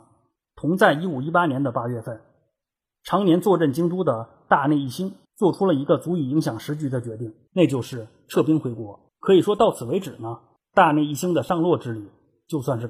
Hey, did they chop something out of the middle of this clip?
yes; 4 cuts; at 5.2 s, 7.5 s, 9.1 s, 10.6 s

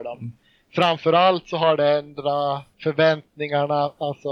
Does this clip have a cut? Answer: yes; 1 cut; at 2.7 s

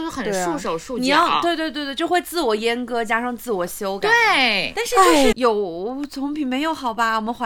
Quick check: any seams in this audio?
yes; 1 cut; at 5.3 s

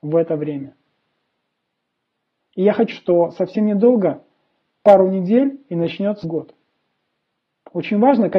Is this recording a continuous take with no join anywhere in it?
no; 3 cuts; at 2.9 s, 4.8 s, 6.2 s

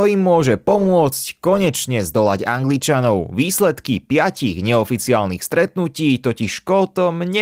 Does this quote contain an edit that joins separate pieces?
no; 0 cuts

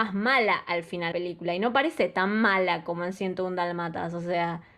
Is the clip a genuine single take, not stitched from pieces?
no; 1 cut; at 1.1 s

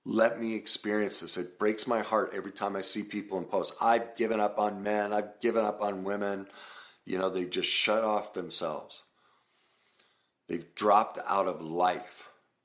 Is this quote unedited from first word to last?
yes; 0 cuts

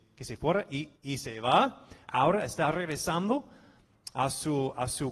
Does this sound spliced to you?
yes; 1 cut; at 1.0 s

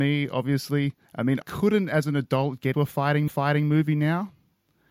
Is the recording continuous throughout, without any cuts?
no; 4 cuts; at 1.0 s, 1.4 s, 2.7 s, 3.3 s

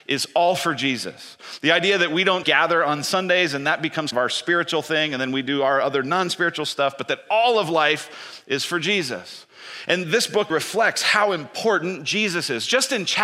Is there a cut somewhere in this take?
yes; 3 cuts; at 2.4 s, 4.1 s, 10.5 s

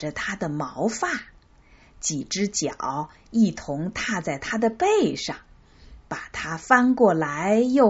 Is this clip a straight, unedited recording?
yes; 0 cuts

